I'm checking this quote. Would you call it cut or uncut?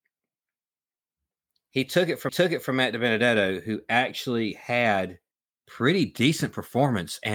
cut